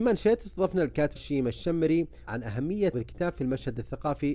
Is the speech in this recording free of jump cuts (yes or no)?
no